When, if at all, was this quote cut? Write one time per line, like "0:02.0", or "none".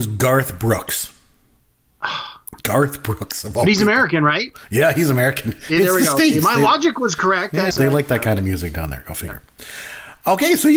0:07.7